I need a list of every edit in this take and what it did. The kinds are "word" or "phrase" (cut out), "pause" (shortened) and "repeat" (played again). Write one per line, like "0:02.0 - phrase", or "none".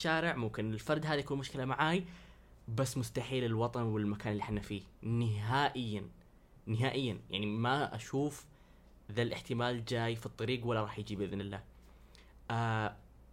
none

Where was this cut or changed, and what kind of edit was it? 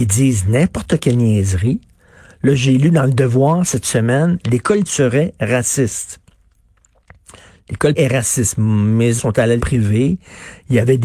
0:04.8 - word
0:07.9 - word
0:09.2 - word
0:09.6 - word

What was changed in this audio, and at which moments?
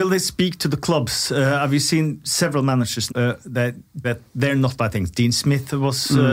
0:03.1 - word
0:04.0 - word
0:04.8 - word

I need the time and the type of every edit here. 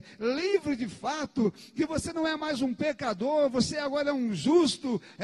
none

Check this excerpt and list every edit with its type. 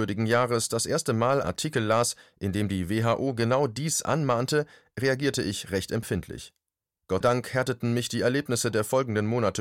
0:01.4 - word
0:07.2 - word

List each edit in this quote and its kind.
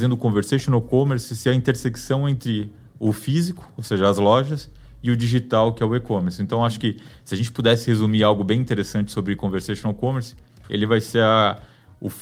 none

